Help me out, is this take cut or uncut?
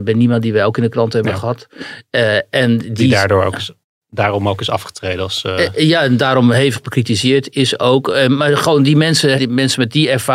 cut